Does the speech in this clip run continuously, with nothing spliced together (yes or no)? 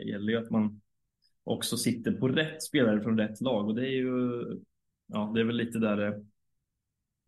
yes